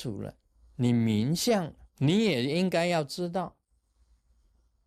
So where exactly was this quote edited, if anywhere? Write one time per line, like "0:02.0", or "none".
0:01.9